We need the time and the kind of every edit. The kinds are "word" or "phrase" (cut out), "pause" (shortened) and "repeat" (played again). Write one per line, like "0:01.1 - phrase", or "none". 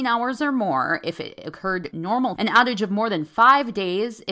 0:01.9 - word
0:02.4 - word